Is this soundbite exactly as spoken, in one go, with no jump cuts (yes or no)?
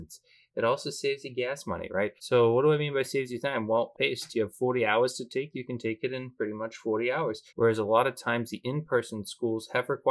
no